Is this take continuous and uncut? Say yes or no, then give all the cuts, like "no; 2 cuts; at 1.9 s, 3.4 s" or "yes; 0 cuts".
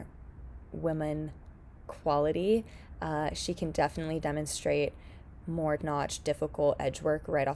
no; 1 cut; at 5.8 s